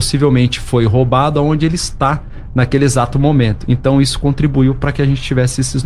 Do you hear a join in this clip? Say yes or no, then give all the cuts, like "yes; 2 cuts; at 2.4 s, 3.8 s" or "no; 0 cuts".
no; 0 cuts